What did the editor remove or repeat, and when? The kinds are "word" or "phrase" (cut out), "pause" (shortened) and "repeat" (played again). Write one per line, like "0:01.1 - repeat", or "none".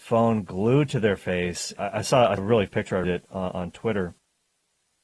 0:01.8 - word
0:02.4 - word
0:02.7 - word
0:03.0 - word